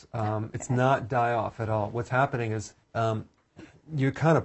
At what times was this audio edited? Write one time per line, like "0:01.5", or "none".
0:02.8